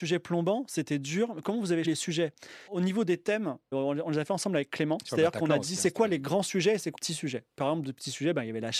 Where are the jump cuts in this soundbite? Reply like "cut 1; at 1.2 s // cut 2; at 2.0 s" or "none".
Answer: cut 1; at 1.8 s // cut 2; at 2.7 s // cut 3; at 3.7 s // cut 4; at 6.9 s